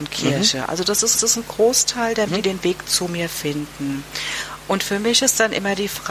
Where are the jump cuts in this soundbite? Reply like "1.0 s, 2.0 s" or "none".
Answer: 1.1 s, 2.3 s